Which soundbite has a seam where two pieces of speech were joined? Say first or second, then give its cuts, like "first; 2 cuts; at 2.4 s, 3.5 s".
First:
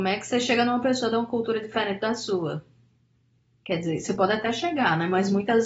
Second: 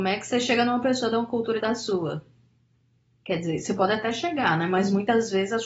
second; 1 cut; at 1.6 s